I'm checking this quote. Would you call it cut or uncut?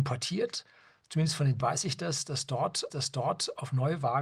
cut